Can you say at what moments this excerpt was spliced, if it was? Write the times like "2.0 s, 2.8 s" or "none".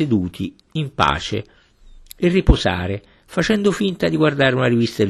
none